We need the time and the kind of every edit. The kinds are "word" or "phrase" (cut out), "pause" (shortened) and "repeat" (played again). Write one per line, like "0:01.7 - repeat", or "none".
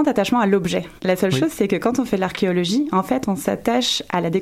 0:01.0 - pause